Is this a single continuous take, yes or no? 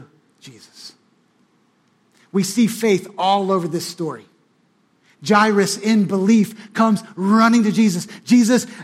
yes